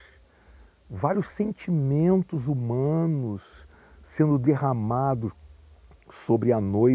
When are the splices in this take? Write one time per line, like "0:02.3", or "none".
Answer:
none